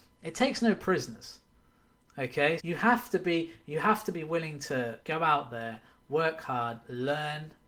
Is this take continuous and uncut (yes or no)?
no